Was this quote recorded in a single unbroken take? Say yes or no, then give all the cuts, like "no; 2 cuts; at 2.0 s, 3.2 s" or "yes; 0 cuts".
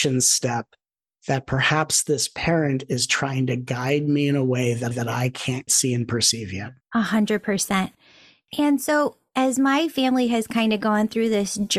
no; 2 cuts; at 4.9 s, 5.7 s